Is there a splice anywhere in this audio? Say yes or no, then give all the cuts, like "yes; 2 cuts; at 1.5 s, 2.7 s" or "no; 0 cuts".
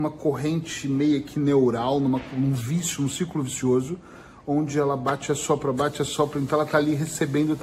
no; 0 cuts